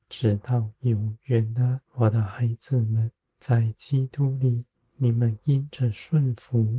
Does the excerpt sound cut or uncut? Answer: cut